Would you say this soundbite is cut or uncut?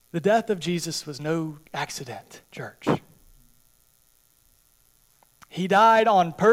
cut